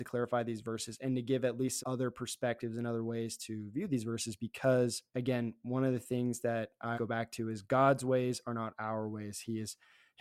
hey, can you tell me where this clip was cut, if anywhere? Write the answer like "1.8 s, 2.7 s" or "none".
1.8 s, 5.1 s, 6.9 s